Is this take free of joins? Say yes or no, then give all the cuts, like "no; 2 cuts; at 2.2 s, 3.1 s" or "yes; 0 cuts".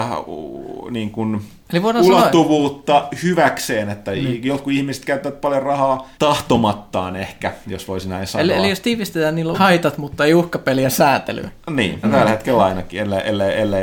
no; 3 cuts; at 6.1 s, 9.5 s, 12.0 s